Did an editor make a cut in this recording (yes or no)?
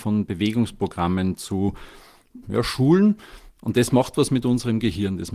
yes